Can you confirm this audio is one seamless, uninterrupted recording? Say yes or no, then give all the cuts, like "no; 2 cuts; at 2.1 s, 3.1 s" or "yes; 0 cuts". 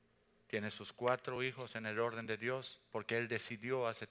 yes; 0 cuts